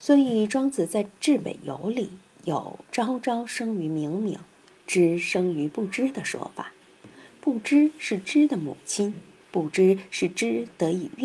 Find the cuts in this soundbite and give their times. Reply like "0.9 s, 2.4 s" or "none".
none